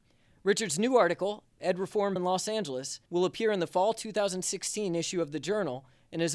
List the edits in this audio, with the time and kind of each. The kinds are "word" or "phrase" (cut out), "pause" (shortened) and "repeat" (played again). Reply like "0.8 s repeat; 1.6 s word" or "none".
2.2 s word; 3.1 s pause